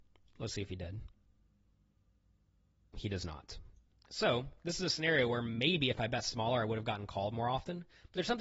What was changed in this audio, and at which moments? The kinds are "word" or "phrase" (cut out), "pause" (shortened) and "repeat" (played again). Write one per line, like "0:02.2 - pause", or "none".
none